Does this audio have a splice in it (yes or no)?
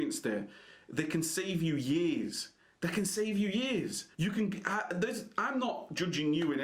yes